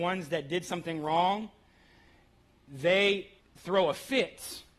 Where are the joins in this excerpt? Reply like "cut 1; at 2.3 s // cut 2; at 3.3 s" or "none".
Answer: cut 1; at 3.4 s